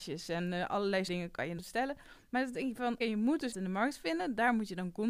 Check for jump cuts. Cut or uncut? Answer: cut